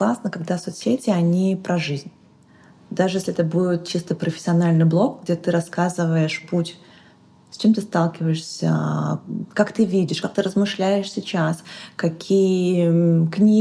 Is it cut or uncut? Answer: uncut